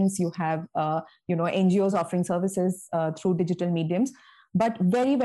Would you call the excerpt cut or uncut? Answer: uncut